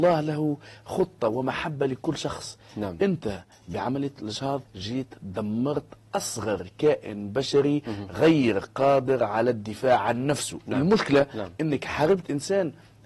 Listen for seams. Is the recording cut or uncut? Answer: cut